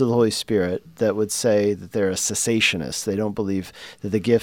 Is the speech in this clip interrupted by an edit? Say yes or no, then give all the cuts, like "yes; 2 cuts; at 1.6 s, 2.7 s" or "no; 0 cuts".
no; 0 cuts